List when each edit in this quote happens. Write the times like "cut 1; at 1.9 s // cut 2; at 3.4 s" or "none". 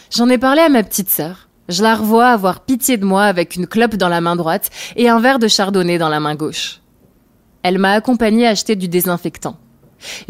cut 1; at 1.5 s